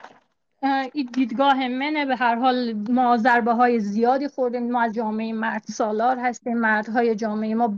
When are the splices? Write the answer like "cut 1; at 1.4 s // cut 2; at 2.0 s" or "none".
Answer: cut 1; at 4.9 s